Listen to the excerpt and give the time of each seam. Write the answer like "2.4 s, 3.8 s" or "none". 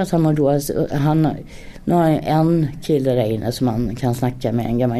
none